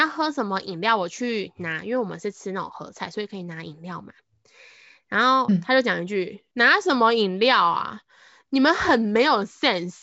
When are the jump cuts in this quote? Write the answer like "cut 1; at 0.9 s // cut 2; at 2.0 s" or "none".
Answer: none